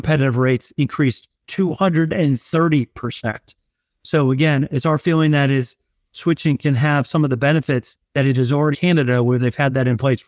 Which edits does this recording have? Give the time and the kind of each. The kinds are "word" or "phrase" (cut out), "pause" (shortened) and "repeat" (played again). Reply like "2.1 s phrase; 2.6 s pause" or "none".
1.3 s pause; 6.1 s phrase; 8.0 s pause; 8.7 s phrase